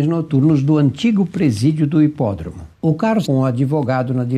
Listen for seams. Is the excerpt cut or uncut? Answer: cut